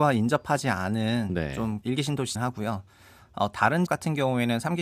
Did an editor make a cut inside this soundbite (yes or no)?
yes